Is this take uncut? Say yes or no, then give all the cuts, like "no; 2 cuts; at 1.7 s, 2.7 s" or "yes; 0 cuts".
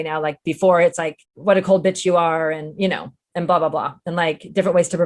no; 1 cut; at 1.2 s